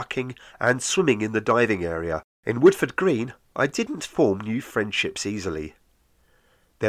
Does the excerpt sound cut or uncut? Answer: cut